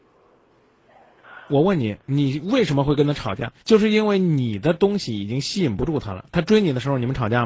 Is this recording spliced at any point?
yes; 2 cuts; at 2.0 s, 3.6 s

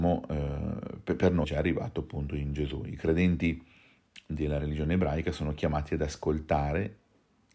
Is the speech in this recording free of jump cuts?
no; 1 cut; at 1.4 s

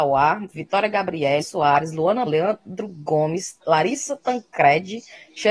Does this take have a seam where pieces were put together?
yes; 3 cuts; at 1.4 s, 2.3 s, 3.6 s

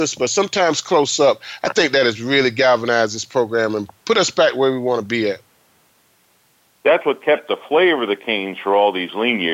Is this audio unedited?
yes; 0 cuts

